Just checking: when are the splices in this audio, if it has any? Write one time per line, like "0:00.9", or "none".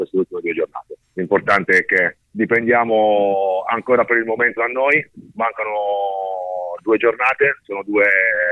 0:01.0
0:02.2
0:04.6